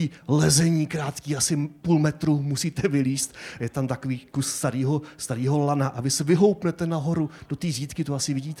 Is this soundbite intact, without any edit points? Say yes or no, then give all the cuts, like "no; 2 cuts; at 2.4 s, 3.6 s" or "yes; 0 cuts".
yes; 0 cuts